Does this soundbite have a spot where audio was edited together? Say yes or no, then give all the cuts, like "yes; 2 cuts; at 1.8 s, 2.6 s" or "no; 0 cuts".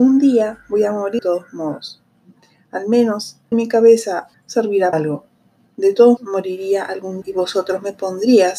yes; 6 cuts; at 1.2 s, 3.5 s, 4.3 s, 4.9 s, 6.2 s, 7.2 s